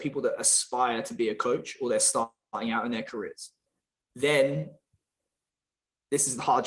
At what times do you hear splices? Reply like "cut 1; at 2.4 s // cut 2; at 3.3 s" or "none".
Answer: none